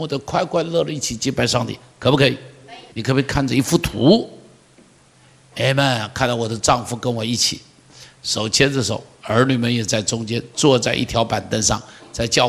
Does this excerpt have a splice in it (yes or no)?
yes